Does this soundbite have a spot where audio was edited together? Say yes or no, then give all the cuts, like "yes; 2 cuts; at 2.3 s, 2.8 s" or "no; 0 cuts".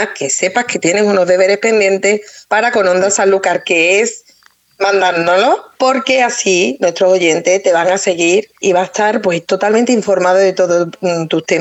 yes; 1 cut; at 8.6 s